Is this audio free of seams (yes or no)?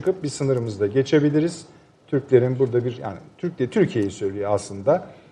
yes